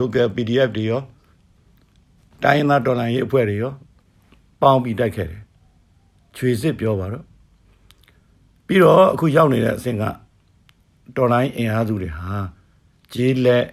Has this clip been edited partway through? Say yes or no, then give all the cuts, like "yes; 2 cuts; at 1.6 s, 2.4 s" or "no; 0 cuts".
no; 0 cuts